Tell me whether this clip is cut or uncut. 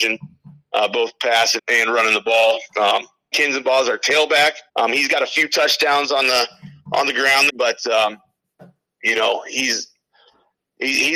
cut